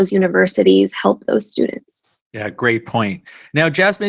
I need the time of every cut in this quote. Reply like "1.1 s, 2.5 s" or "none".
none